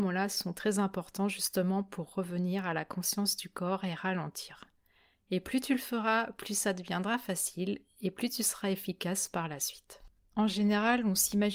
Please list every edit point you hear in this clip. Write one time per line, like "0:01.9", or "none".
none